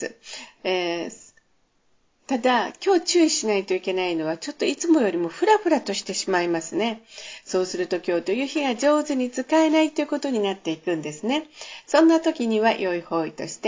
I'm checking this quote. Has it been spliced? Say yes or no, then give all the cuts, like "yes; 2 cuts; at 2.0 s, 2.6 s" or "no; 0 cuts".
no; 0 cuts